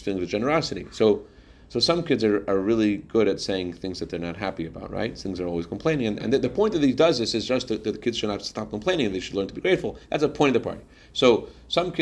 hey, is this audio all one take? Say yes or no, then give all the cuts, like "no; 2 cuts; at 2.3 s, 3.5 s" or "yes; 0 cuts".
yes; 0 cuts